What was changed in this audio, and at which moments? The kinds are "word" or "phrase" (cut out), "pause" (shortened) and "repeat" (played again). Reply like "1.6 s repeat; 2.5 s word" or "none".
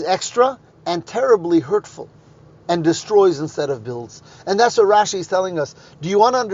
none